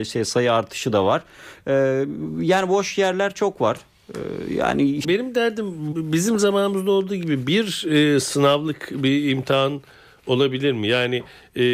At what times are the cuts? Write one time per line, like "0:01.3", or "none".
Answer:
0:05.0
0:05.9